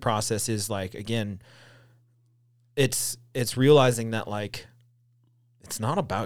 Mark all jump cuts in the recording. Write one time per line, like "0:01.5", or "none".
none